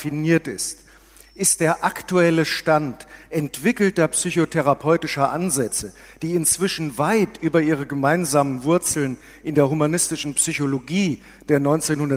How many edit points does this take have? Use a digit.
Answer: 0